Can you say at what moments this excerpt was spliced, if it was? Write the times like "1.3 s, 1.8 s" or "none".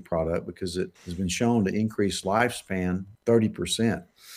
1.0 s, 3.1 s